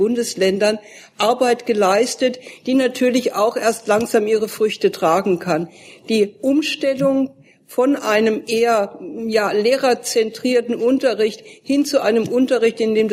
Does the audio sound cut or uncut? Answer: uncut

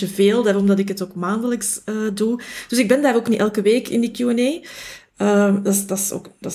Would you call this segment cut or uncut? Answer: uncut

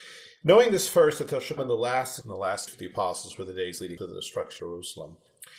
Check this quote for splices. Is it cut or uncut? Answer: cut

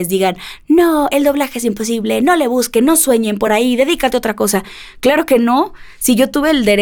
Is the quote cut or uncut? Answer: uncut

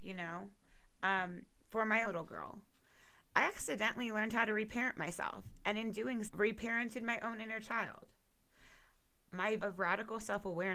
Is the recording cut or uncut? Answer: cut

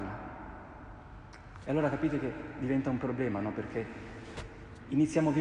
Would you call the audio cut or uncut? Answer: uncut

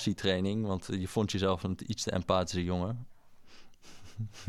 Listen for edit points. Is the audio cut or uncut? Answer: uncut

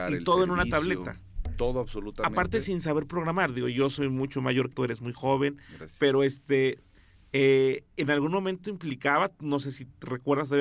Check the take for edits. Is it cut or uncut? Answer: cut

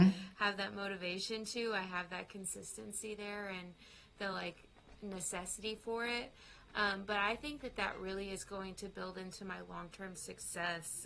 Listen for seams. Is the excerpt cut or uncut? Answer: uncut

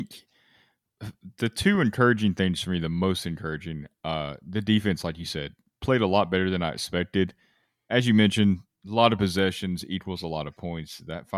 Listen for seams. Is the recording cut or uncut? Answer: uncut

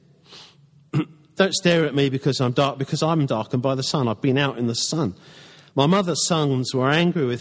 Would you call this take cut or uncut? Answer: uncut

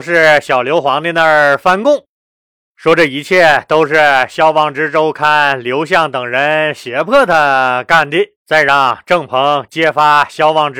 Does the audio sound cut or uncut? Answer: cut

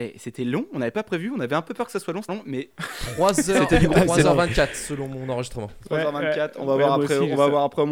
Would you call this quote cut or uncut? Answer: cut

